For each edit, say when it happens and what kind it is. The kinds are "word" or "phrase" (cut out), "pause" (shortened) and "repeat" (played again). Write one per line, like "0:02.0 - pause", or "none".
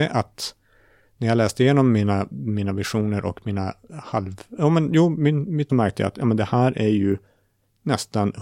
0:05.7 - phrase